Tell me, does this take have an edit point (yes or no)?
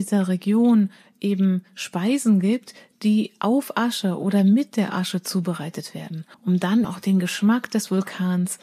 yes